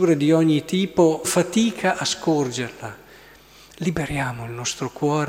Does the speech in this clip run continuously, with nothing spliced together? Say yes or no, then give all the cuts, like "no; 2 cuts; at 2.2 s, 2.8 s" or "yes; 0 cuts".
no; 1 cut; at 1.2 s